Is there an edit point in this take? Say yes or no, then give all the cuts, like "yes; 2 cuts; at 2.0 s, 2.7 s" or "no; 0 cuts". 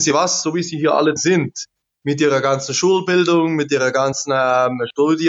yes; 1 cut; at 1.2 s